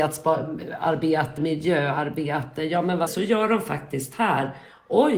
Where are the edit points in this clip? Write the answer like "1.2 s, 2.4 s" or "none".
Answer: 1.4 s, 3.1 s